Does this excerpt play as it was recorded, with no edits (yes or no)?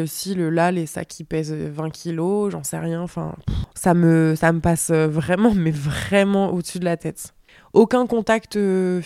yes